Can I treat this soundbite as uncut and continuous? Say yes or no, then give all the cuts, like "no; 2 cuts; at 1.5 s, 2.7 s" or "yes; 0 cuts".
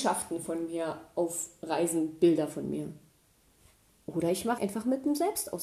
no; 1 cut; at 4.6 s